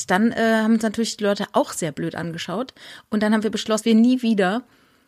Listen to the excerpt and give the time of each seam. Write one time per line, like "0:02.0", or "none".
0:03.8